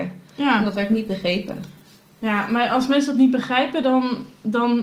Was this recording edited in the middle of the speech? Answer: no; 0 cuts

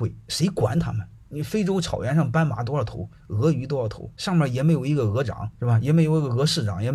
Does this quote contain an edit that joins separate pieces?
yes; 2 cuts; at 4.2 s, 5.5 s

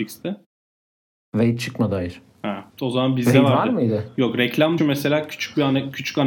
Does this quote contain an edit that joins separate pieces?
yes; 2 cuts; at 2.7 s, 4.8 s

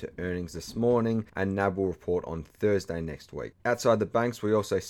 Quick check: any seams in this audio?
yes; 1 cut; at 3.6 s

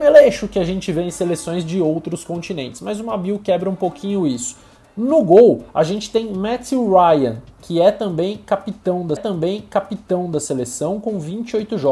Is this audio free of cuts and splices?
no; 1 cut; at 9.2 s

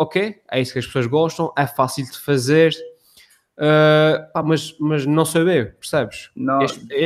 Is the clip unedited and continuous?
yes; 0 cuts

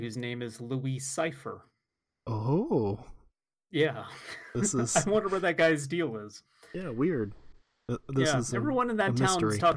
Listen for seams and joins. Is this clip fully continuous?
yes; 0 cuts

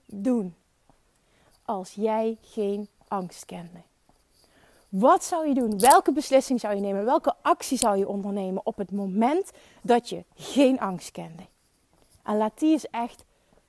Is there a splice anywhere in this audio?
no; 0 cuts

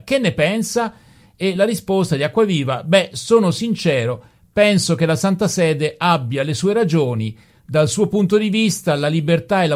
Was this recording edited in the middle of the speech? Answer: no; 0 cuts

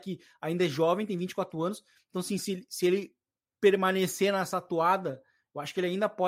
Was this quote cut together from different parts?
no; 0 cuts

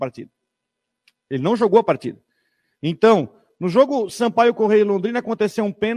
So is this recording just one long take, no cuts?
yes; 0 cuts

